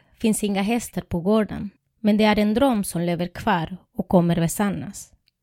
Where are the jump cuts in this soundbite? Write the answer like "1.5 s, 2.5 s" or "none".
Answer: 1.8 s